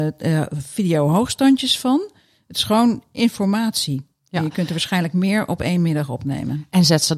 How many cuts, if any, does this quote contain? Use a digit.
0